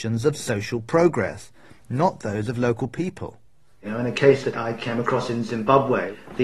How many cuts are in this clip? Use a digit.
0